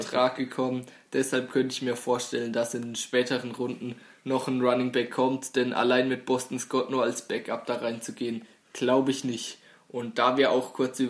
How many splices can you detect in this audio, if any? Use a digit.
0